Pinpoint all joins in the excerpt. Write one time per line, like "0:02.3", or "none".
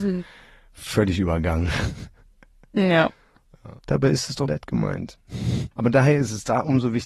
0:03.8
0:04.5
0:05.7